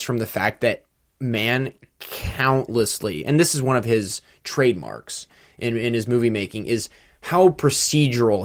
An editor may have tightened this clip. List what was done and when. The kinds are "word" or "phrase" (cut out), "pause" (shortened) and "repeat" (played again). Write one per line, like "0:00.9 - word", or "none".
none